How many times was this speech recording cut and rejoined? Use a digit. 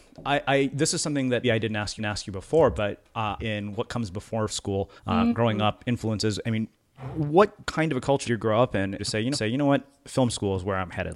9